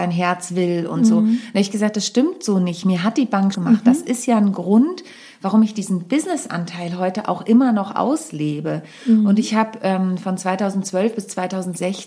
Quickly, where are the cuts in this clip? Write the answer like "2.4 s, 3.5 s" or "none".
3.5 s